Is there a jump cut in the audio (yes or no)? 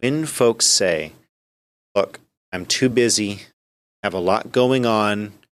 no